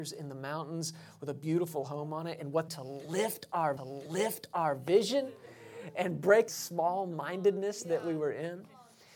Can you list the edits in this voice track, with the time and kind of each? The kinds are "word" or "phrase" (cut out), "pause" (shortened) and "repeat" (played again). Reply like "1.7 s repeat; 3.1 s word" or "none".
2.7 s phrase; 3.8 s repeat; 6.5 s phrase